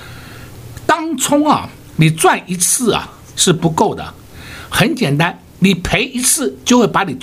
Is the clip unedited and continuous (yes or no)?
yes